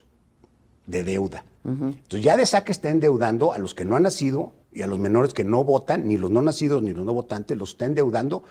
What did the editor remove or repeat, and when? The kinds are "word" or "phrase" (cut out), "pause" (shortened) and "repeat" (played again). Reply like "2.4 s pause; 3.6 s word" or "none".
4.6 s pause